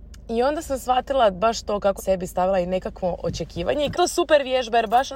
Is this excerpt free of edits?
no; 2 cuts; at 2.0 s, 3.9 s

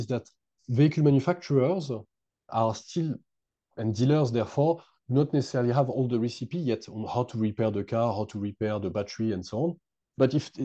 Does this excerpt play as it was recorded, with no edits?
yes; 0 cuts

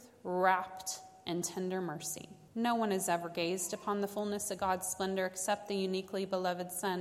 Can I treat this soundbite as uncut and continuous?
no; 1 cut; at 2.5 s

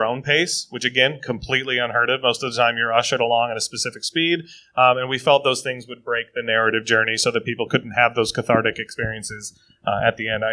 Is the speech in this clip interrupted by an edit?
no; 0 cuts

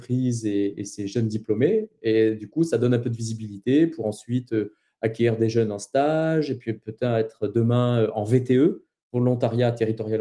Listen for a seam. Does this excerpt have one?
no; 0 cuts

